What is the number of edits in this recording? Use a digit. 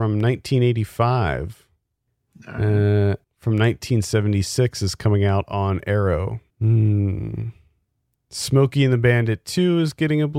2